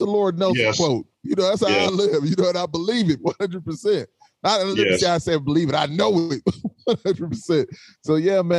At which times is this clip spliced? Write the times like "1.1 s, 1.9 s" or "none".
none